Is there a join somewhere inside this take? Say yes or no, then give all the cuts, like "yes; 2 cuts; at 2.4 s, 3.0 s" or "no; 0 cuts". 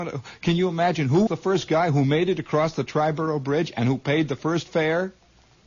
yes; 1 cut; at 1.3 s